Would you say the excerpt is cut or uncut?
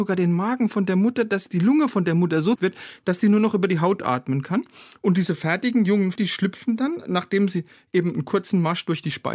cut